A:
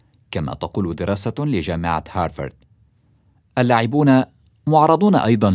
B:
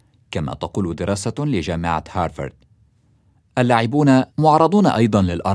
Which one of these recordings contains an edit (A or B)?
B